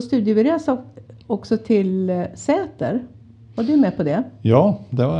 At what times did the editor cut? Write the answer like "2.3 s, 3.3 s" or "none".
none